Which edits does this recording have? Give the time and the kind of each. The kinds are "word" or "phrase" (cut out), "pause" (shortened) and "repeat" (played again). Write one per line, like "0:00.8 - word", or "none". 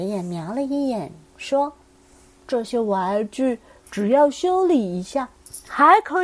none